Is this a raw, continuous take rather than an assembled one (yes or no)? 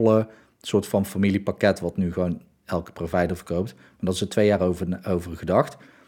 yes